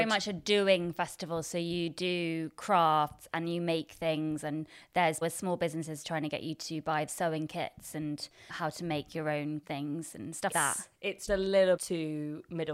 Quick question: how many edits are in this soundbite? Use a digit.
7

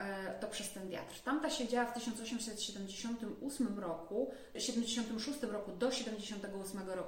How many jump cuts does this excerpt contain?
1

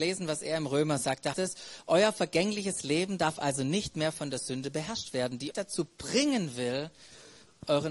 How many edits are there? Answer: 2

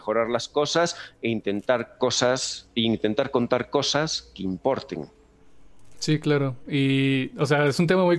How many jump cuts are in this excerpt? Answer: 0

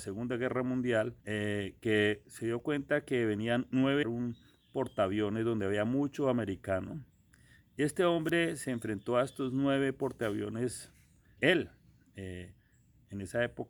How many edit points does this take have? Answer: 3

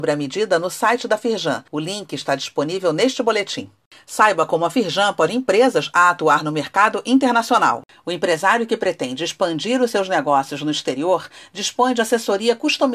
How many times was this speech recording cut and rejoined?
2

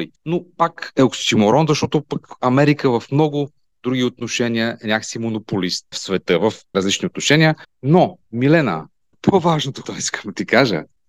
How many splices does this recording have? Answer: 3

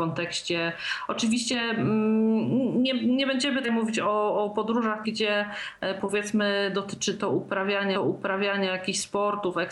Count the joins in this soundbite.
3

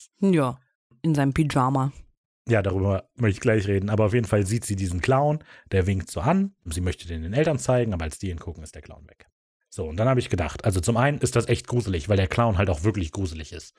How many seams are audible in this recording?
0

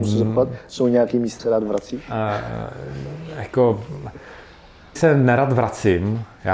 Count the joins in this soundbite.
2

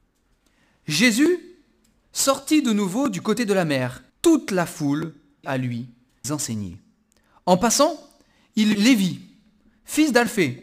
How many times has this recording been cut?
4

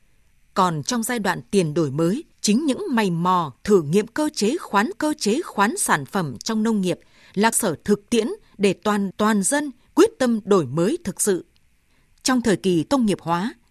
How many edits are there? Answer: 5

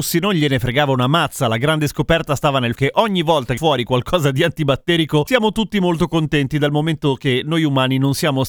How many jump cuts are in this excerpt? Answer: 2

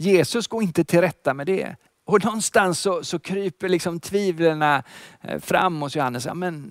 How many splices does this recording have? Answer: 1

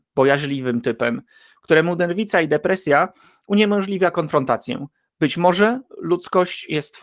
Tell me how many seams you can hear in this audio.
0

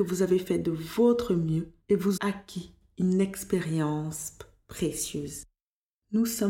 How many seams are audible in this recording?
2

